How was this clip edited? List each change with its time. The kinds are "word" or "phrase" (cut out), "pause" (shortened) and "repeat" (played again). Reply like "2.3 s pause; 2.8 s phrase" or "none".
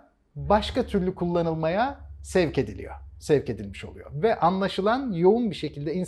none

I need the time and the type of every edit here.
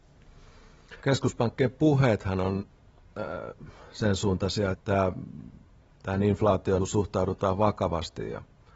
1.0 s pause; 4.7 s word; 6.8 s word

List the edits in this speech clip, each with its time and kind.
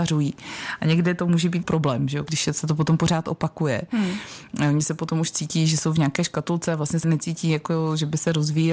1.6 s phrase; 7.0 s word

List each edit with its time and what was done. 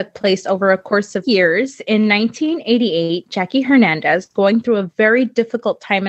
1.2 s word; 4.3 s word

